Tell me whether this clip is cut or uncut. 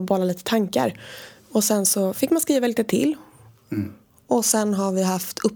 uncut